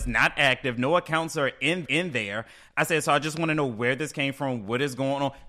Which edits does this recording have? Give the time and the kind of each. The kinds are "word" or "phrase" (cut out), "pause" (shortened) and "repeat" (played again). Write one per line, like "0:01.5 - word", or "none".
0:01.8 - repeat